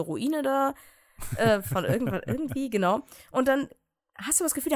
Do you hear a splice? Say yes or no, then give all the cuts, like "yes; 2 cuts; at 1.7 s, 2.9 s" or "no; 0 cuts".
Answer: no; 0 cuts